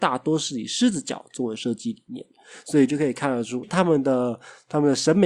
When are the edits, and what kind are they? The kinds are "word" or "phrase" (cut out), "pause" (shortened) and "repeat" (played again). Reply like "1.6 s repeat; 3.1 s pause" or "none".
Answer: 3.6 s word